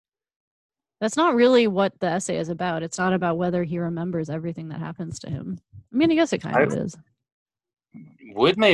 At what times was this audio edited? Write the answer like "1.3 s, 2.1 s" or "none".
none